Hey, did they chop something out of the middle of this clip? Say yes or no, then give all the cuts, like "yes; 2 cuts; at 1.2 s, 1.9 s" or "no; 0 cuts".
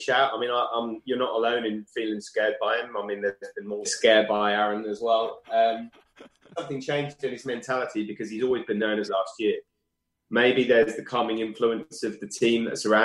yes; 3 cuts; at 3.8 s, 6.5 s, 9.1 s